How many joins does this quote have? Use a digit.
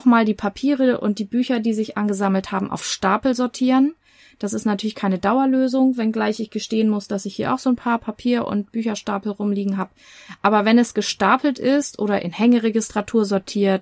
0